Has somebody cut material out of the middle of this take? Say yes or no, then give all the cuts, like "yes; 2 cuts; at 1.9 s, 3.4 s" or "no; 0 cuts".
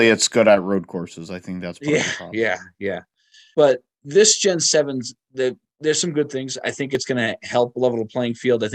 no; 0 cuts